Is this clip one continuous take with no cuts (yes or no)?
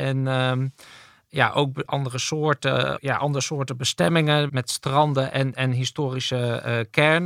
no